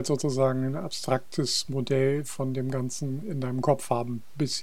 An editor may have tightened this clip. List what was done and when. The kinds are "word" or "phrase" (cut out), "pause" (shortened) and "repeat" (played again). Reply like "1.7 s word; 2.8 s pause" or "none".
none